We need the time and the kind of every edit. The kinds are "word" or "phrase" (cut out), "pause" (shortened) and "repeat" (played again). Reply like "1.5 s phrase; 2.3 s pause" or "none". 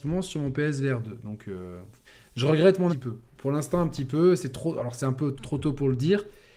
2.0 s pause; 2.9 s phrase; 5.4 s word